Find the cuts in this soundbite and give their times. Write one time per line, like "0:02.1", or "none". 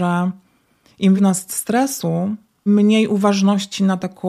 0:01.2
0:02.7